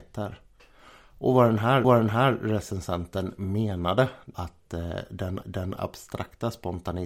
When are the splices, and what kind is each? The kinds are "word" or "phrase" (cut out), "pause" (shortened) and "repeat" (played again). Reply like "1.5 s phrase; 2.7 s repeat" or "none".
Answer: 1.8 s repeat; 4.3 s word; 5.4 s repeat